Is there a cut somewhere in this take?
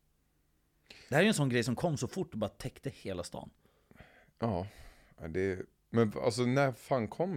no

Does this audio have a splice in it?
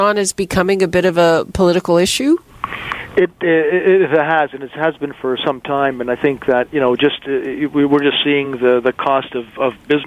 no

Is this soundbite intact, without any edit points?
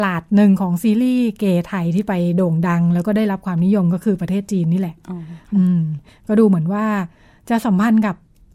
yes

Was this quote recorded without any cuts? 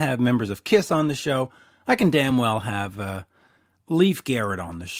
yes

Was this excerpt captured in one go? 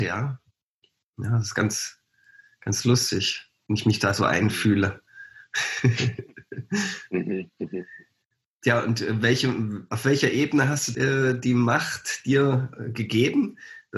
no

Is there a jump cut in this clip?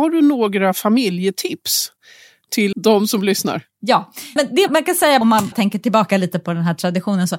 yes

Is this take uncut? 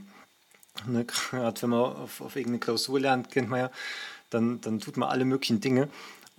yes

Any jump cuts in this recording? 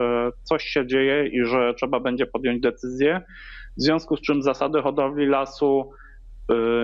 no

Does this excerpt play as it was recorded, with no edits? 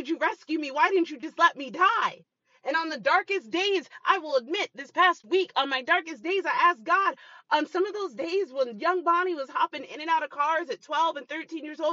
yes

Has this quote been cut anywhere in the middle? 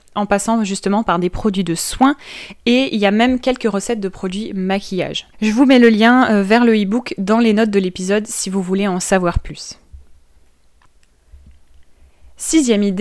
yes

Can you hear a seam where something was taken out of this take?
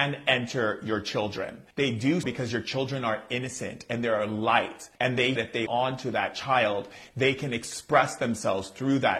yes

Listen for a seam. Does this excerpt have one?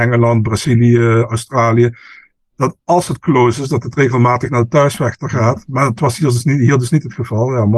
no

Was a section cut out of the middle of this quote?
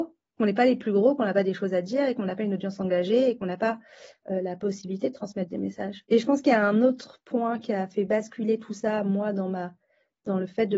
no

